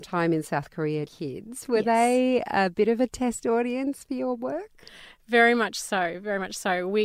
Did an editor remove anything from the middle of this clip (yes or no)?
yes